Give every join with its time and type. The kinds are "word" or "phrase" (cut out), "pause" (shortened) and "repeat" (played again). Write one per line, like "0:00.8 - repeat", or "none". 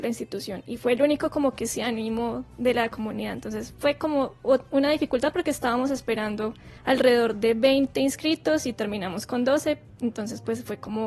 0:06.8 - pause